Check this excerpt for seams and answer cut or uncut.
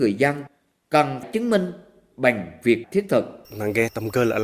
cut